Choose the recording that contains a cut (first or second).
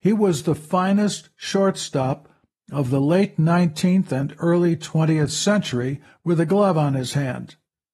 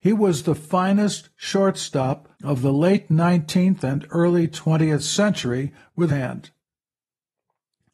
second